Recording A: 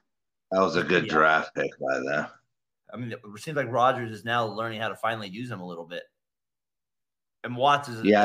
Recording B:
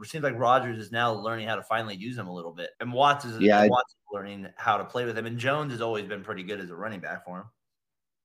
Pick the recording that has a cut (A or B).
B